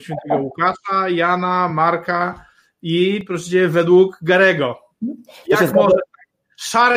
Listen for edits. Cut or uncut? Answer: uncut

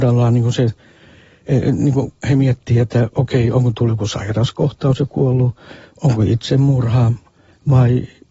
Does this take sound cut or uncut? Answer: uncut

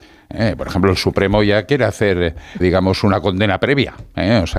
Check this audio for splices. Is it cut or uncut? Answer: cut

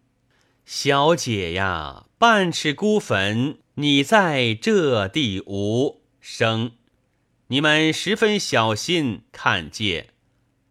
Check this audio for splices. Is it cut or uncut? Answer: cut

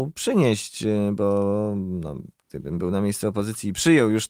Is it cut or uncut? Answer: uncut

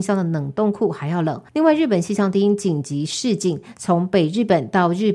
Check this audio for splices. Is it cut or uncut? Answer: cut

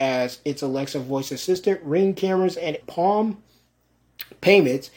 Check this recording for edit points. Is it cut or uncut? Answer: cut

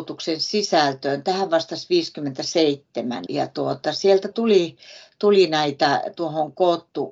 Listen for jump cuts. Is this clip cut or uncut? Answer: cut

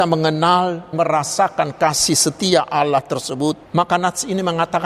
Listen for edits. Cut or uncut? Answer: cut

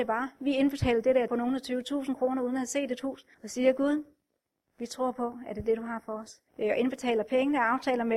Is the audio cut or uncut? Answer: cut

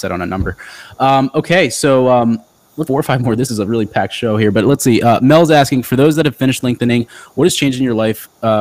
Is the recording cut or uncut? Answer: cut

